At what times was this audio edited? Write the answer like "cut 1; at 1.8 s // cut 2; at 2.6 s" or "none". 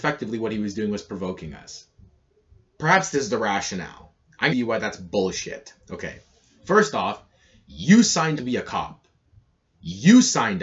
cut 1; at 3.1 s // cut 2; at 4.5 s // cut 3; at 5.8 s // cut 4; at 8.4 s